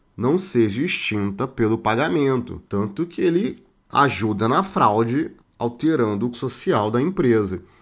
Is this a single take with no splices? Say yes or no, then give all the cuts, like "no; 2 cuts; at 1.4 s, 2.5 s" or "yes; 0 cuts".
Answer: no; 3 cuts; at 2.7 s, 5.4 s, 6.3 s